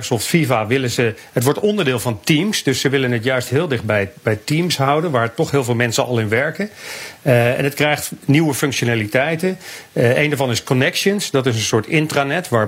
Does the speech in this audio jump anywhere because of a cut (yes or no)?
no